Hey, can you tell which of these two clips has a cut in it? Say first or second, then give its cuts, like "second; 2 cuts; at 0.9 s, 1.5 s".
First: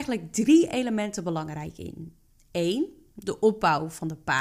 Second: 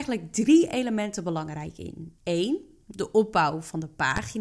second; 1 cut; at 2.2 s